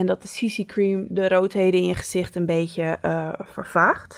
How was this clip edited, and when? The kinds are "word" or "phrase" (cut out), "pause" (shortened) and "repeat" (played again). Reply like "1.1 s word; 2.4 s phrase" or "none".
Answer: none